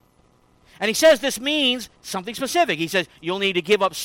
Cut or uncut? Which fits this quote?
cut